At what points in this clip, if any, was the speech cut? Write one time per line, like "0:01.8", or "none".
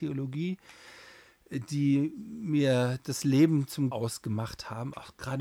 0:03.9

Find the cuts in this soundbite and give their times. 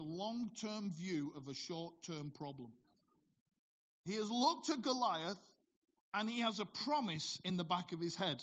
none

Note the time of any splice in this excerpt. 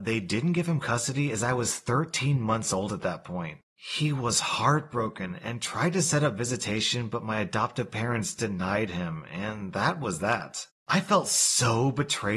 none

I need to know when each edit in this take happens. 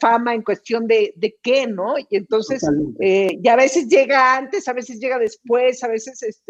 none

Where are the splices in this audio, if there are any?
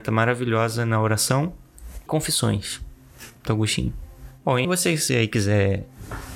0:02.1
0:03.5
0:04.6
0:05.1

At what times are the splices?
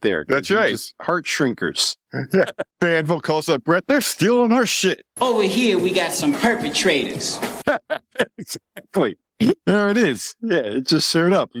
0:02.7

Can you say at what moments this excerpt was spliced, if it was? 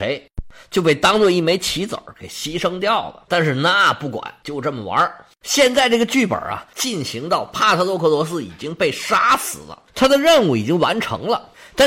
0:09.9

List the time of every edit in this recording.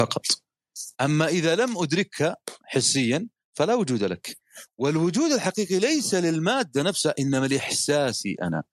0:00.9

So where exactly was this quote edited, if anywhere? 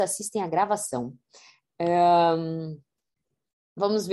none

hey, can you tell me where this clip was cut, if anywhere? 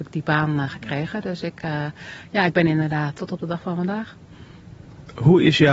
0:03.2

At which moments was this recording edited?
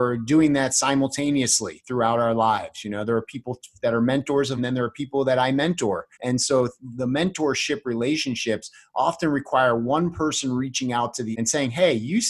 0:04.6
0:06.1
0:11.3

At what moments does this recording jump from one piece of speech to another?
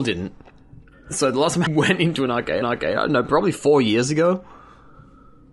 0:01.7
0:02.6

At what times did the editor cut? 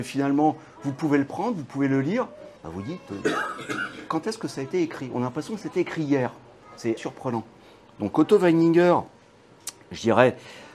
0:02.6
0:07.0

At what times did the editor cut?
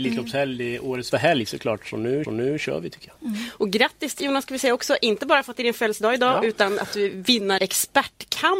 0:01.1
0:02.2
0:04.2
0:07.6

